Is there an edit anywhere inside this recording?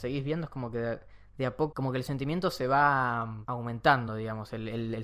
no; 0 cuts

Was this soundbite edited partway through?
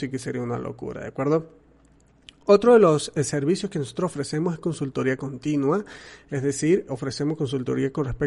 yes; 1 cut; at 6.9 s

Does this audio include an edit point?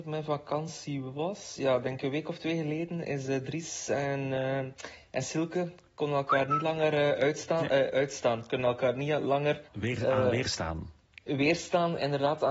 yes; 1 cut; at 9.7 s

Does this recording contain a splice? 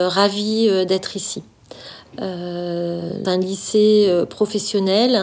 yes; 1 cut; at 3.2 s

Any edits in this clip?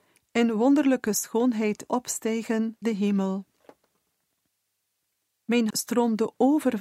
yes; 3 cuts; at 1.9 s, 2.8 s, 5.7 s

